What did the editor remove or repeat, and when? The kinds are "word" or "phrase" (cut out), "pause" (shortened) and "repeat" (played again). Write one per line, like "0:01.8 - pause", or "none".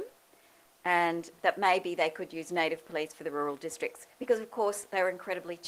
0:04.1 - pause